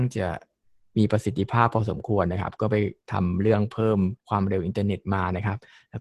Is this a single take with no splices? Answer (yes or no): no